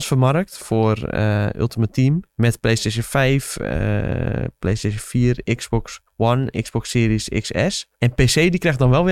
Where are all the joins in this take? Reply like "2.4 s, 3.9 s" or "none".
2.3 s, 6.1 s, 7.9 s